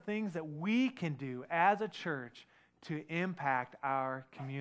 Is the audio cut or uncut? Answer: uncut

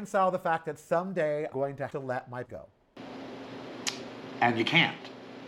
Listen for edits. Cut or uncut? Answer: cut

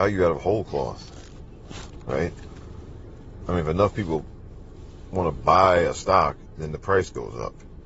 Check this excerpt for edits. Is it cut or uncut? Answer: uncut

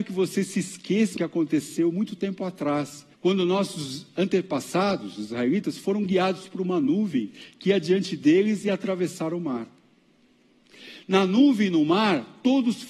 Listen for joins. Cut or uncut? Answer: cut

